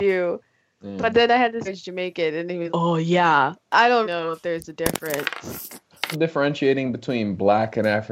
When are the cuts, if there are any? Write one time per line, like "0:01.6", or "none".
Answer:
0:01.6
0:02.7
0:04.0
0:06.1

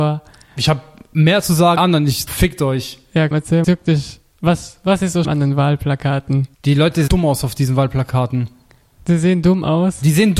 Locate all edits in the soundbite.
0:01.8
0:02.3
0:03.3
0:03.6
0:05.2
0:06.5
0:07.1

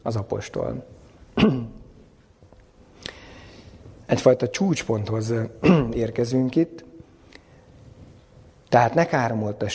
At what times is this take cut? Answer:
none

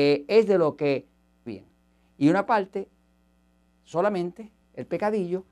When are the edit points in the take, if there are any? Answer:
0:01.5
0:02.5

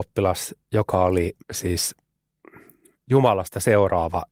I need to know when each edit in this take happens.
0:01.4

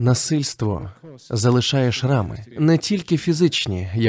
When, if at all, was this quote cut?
0:02.5

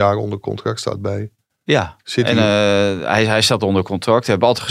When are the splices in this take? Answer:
none

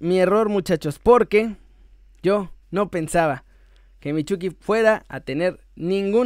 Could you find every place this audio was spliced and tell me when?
none

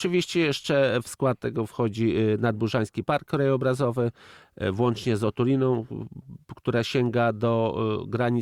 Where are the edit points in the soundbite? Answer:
none

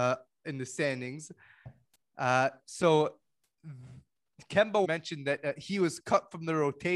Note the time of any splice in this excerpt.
0:04.8

